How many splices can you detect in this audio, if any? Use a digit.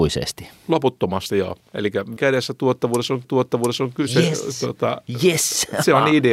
2